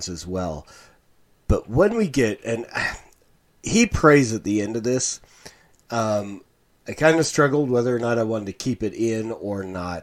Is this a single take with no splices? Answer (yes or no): yes